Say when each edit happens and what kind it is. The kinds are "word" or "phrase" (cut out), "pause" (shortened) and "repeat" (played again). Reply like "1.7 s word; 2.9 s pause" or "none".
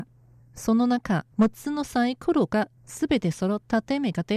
1.3 s pause; 2.8 s pause